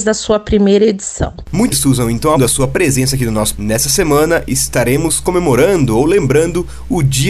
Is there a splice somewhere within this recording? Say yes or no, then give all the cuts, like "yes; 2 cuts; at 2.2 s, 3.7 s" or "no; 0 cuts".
yes; 3 cuts; at 1.7 s, 2.4 s, 3.5 s